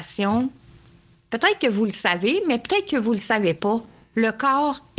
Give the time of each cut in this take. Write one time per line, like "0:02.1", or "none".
none